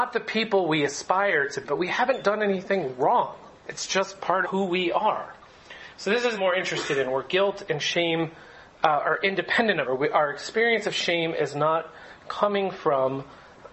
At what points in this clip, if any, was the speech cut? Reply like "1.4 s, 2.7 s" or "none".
1.6 s, 3.6 s, 4.4 s, 6.4 s, 9.8 s

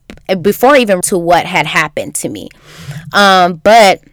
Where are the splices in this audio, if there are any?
1.0 s

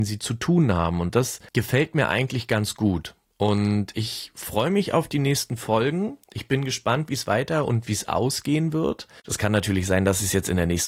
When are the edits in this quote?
6.2 s

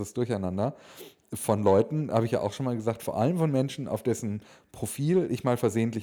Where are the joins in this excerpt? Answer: none

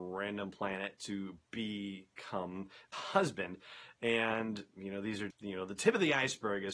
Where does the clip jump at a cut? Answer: 2.9 s, 5.3 s

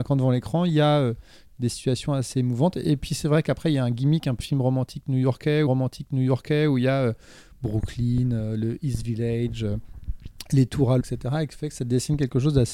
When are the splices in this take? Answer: 4.4 s, 5.7 s, 11.0 s

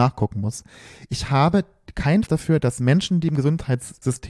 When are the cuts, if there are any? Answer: 2.3 s

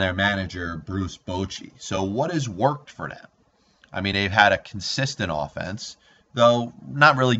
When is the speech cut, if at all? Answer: none

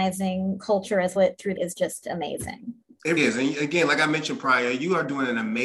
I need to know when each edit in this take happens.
1.2 s, 1.6 s, 3.2 s

